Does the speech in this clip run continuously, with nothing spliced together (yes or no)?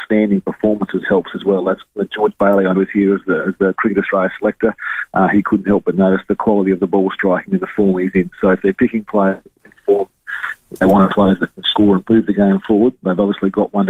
no